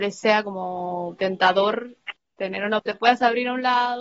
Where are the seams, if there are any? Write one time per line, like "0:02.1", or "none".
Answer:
0:02.2
0:02.8